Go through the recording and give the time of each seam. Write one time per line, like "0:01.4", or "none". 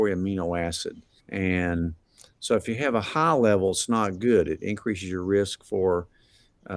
0:01.2